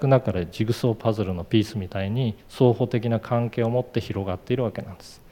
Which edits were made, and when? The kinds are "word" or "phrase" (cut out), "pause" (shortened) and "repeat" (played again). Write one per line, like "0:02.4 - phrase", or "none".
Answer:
0:02.4 - pause